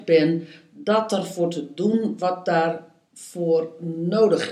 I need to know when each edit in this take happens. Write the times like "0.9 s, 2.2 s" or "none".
none